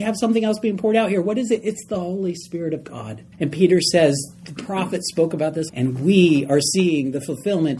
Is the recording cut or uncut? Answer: cut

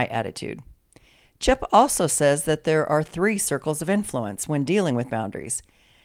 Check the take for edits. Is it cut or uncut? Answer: uncut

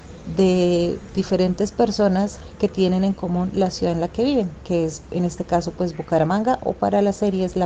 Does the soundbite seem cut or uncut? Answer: uncut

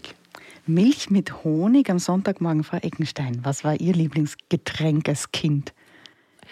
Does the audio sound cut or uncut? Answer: uncut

